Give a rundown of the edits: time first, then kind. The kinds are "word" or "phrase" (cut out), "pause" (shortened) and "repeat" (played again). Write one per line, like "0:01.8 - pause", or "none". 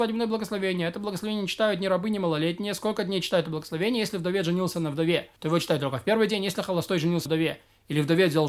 0:05.4 - pause
0:07.3 - word